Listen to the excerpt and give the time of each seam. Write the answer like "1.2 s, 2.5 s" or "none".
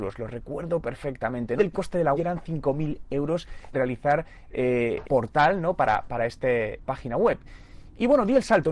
1.6 s, 2.1 s, 3.7 s, 5.0 s, 6.9 s